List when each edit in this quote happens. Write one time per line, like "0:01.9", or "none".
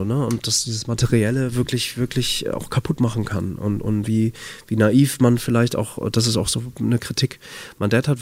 none